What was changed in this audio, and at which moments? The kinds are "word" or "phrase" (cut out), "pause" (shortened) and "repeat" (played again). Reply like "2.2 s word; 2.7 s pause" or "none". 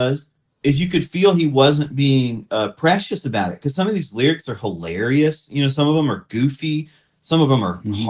none